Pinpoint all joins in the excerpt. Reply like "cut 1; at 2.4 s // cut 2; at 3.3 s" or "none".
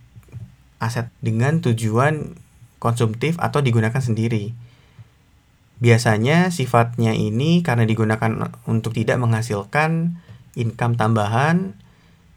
cut 1; at 1.1 s // cut 2; at 8.9 s